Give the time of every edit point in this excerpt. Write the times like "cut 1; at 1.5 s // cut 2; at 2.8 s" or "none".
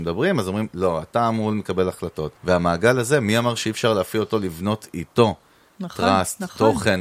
cut 1; at 2.4 s